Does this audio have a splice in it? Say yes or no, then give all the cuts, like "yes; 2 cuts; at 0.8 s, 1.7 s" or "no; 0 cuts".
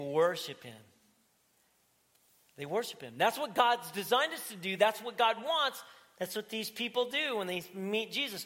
no; 0 cuts